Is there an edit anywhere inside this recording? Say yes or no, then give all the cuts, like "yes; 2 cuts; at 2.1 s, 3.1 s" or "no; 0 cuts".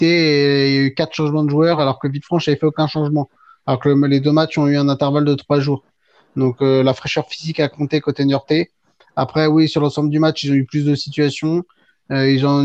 no; 0 cuts